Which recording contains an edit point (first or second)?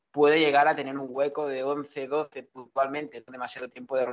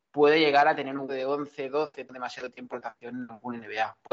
second